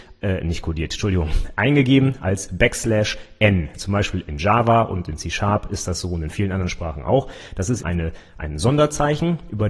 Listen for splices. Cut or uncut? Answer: cut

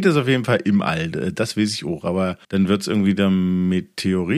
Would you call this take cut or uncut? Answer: cut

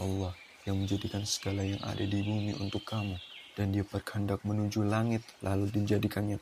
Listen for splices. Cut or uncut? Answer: cut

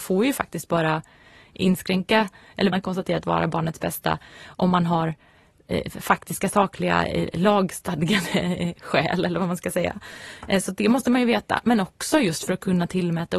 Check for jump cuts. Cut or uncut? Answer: cut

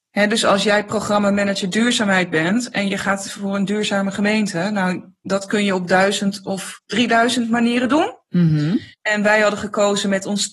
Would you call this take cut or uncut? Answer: cut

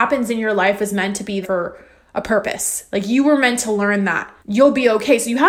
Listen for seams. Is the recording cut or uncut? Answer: cut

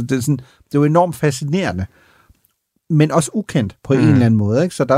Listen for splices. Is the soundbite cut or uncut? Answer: uncut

